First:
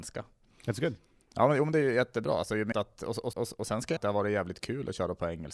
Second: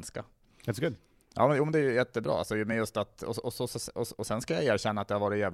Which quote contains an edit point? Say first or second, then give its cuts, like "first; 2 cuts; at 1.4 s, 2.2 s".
first; 3 cuts; at 2.7 s, 3.3 s, 4.0 s